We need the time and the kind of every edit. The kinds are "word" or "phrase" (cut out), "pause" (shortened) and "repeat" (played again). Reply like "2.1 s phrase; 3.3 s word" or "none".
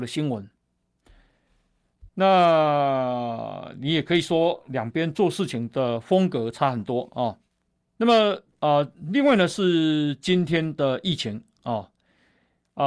2.1 s pause; 7.8 s pause